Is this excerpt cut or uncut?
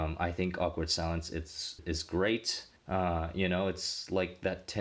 cut